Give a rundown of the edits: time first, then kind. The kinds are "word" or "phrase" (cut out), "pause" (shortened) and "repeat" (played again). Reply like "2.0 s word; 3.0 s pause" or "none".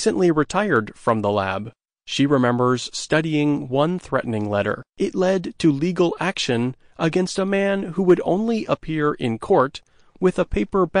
1.8 s pause; 4.9 s pause